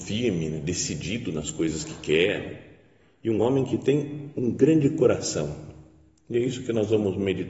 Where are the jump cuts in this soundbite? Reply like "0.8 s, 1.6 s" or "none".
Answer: none